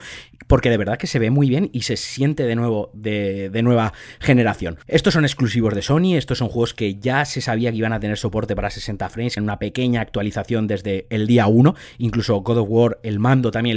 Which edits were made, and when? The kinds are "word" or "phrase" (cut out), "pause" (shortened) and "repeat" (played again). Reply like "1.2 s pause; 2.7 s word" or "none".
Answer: 9.4 s phrase